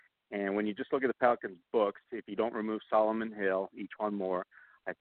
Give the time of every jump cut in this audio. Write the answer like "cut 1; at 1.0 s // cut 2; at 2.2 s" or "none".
none